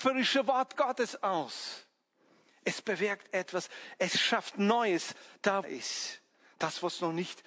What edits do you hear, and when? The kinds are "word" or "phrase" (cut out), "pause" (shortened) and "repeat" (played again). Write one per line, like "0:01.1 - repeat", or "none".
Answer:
0:05.6 - phrase